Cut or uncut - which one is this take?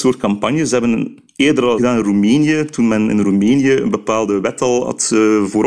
cut